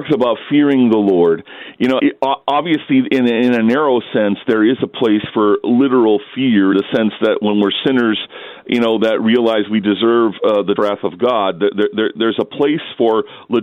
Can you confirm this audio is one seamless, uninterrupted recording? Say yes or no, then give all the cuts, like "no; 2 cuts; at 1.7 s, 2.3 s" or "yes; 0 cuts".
no; 3 cuts; at 2.0 s, 6.7 s, 10.8 s